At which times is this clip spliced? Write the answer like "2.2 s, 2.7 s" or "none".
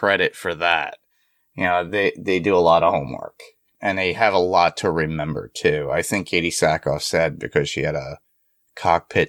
none